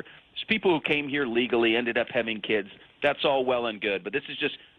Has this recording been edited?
no; 0 cuts

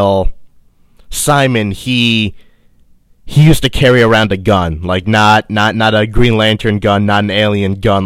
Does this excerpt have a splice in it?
no; 0 cuts

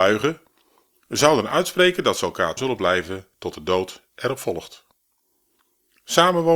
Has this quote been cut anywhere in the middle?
yes; 1 cut; at 2.6 s

